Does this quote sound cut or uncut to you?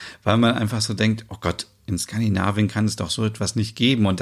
uncut